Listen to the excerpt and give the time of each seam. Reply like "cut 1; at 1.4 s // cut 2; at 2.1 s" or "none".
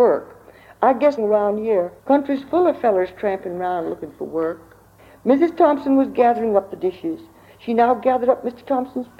cut 1; at 1.2 s // cut 2; at 2.0 s // cut 3; at 5.0 s